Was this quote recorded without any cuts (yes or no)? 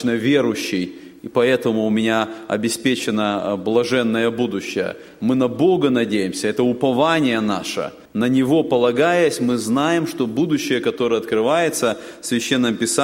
no